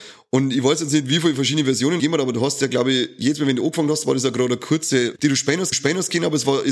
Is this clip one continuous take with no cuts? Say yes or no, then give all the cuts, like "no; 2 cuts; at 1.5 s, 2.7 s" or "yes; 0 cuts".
no; 3 cuts; at 2.0 s, 5.2 s, 5.7 s